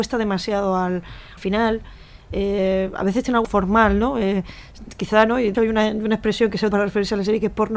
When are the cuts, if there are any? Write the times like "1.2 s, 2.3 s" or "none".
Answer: 1.4 s, 3.4 s, 5.5 s, 6.7 s